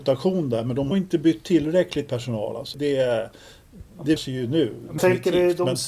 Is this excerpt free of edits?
no; 5 cuts; at 0.9 s, 2.1 s, 2.7 s, 4.2 s, 5.0 s

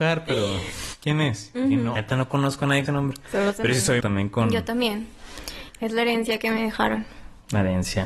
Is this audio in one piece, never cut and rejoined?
no; 3 cuts; at 2.0 s, 2.9 s, 4.0 s

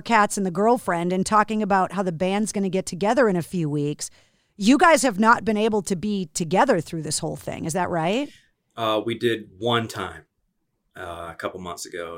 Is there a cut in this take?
no; 0 cuts

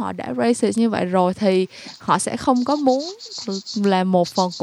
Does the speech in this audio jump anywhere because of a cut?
no; 0 cuts

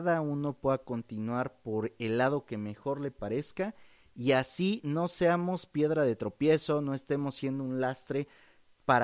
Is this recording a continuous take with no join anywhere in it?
yes; 0 cuts

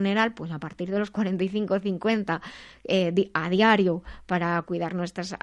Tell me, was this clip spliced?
no; 0 cuts

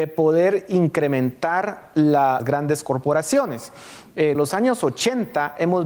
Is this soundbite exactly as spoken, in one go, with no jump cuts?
no; 2 cuts; at 2.4 s, 4.3 s

